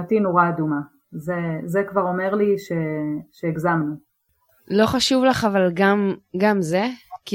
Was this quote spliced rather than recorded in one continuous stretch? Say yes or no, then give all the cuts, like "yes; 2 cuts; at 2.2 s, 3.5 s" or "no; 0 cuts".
no; 0 cuts